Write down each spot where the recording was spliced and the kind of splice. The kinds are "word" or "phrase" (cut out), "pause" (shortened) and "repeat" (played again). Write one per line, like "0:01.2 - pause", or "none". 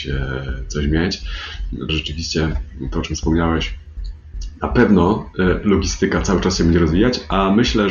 0:01.9 - word